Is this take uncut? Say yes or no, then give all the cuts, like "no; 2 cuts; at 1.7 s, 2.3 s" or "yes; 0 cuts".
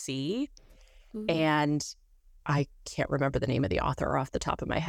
yes; 0 cuts